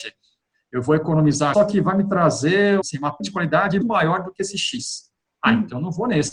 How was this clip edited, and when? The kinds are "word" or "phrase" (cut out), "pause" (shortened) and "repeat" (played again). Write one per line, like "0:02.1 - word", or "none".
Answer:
0:01.5 - word
0:02.8 - word
0:03.2 - word
0:03.8 - word